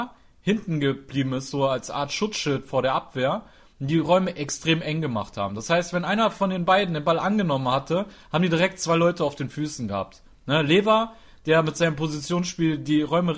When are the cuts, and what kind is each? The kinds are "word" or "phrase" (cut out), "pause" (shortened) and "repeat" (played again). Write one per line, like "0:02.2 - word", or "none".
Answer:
none